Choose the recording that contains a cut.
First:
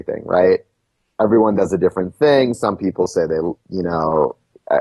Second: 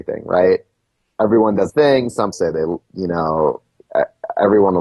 second; 2 cuts; at 1.7 s, 2.3 s

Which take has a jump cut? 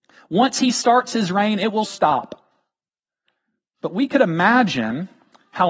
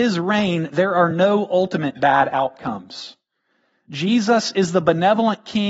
first; 1 cut; at 1.8 s

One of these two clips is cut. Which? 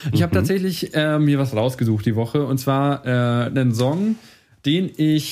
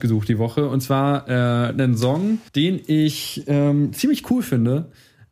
second; 1 cut; at 2.5 s

